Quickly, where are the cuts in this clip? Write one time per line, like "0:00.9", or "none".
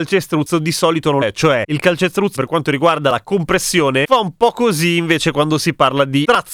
0:01.2
0:02.4

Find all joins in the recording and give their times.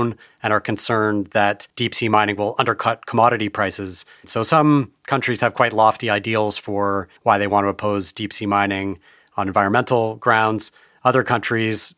0:01.7
0:07.2

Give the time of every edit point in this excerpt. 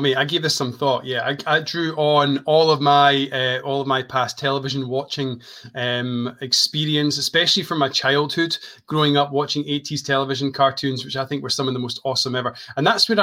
none

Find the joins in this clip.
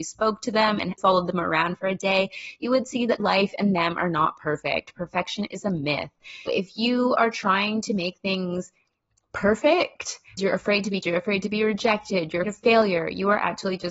0:01.0
0:03.2
0:06.5
0:10.4
0:11.0
0:12.4

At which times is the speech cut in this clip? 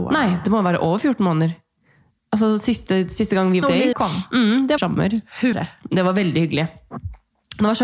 0:03.6
0:03.9
0:04.8
0:05.5

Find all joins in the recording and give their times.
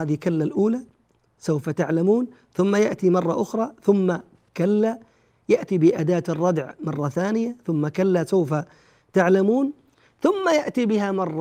none

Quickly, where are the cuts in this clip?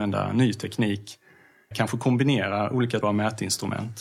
0:01.7
0:03.0

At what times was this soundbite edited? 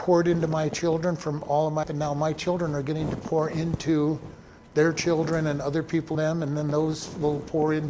0:01.8
0:06.1

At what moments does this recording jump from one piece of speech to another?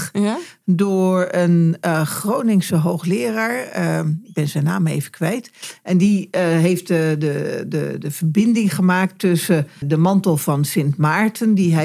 0:09.8

